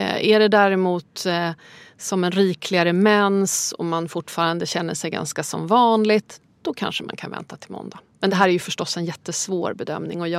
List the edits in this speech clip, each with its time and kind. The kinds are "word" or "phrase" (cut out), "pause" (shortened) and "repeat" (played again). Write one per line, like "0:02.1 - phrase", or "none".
none